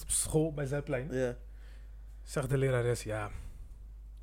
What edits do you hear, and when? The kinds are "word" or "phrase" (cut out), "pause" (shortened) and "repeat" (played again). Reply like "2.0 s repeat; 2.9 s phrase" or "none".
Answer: none

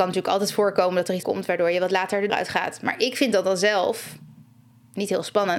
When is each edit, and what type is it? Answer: 1.2 s word; 2.3 s word

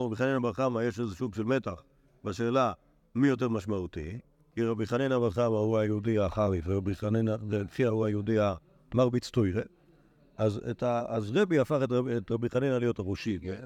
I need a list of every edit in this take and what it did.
none

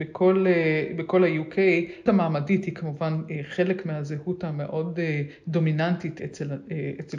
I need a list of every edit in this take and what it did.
2.1 s word; 6.2 s word

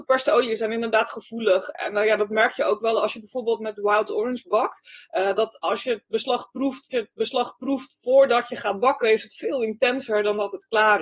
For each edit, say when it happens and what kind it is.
6.9 s repeat

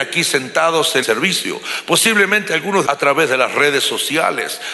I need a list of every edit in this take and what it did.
1.0 s word; 2.9 s phrase

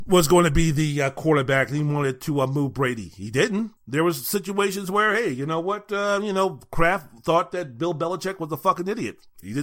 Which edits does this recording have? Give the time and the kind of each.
3.8 s pause

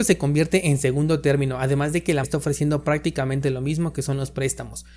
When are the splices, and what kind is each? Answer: 2.2 s word

